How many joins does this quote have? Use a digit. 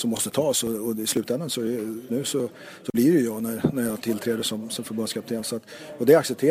1